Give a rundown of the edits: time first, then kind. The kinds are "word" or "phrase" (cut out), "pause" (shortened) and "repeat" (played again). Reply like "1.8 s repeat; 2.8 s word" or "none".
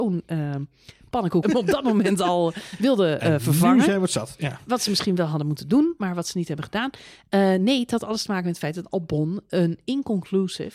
1.4 s phrase

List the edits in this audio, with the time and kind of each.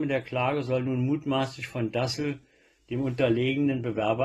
none

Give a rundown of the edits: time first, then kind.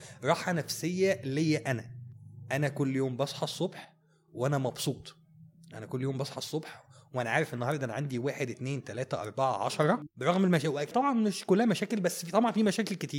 none

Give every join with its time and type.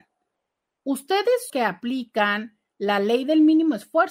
1.5 s phrase

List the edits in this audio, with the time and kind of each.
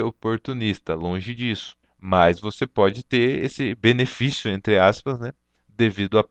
none

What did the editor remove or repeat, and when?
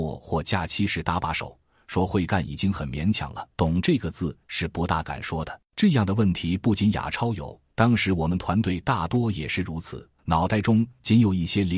3.5 s pause; 5.7 s pause; 7.7 s pause; 10.2 s pause

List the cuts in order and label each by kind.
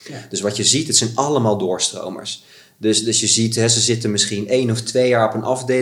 none

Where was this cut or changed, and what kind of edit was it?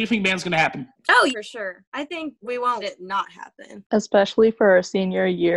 1.3 s word; 2.8 s word

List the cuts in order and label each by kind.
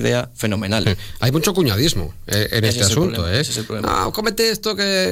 none

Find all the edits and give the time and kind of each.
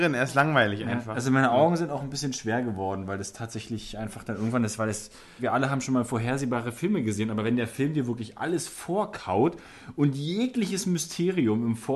none

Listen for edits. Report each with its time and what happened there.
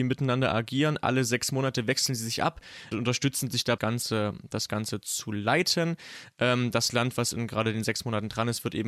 2.9 s word; 3.8 s phrase

